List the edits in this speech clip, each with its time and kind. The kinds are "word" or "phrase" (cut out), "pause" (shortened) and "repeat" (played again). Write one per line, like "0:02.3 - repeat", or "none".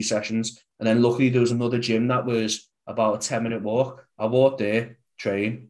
none

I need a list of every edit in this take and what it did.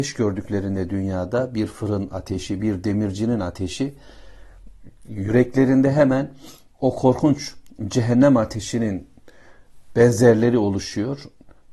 none

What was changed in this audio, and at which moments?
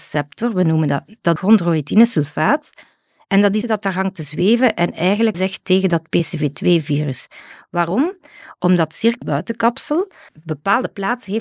0:01.4 - word
0:03.6 - phrase
0:05.3 - word
0:09.2 - phrase

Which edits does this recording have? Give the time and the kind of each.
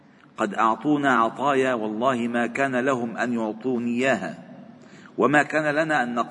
none

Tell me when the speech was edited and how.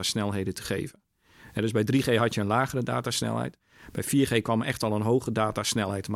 none

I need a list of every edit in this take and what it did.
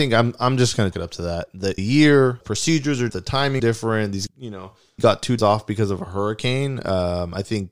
0:00.9 - word
0:01.8 - word
0:02.4 - word
0:03.1 - word
0:03.6 - word
0:04.3 - word
0:05.0 - word
0:05.4 - word

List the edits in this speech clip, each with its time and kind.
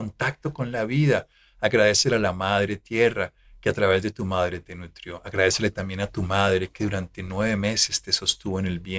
none

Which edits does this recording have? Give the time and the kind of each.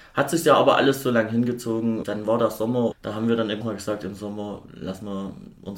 0:02.0 - word
0:02.9 - word
0:03.6 - word

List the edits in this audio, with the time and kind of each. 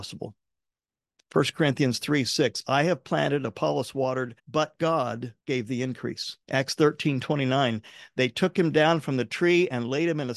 0:04.4 - pause
0:05.4 - pause
0:06.4 - pause

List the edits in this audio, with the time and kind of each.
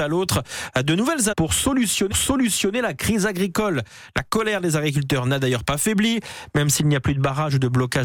0:01.3 - word
0:02.1 - repeat

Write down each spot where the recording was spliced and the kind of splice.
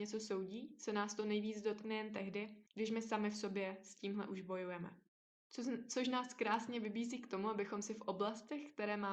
0:02.7 - pause
0:05.1 - pause

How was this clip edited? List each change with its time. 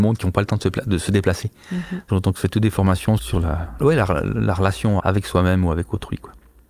0:02.1 - word
0:03.2 - word
0:03.8 - word
0:05.0 - word

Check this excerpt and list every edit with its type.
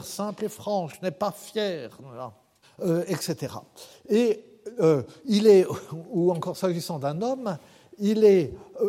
0:02.6 - pause

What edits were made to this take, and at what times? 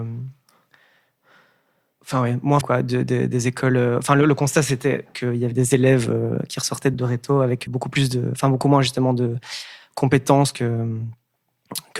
0:02.6 - word
0:05.5 - word
0:06.9 - word
0:07.7 - word

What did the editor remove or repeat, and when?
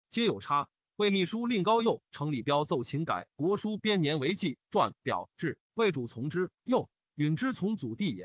0:06.5 - pause

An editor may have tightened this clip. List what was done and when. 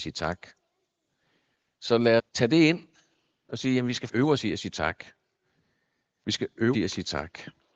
0:02.2 - word
0:04.1 - word
0:06.7 - word

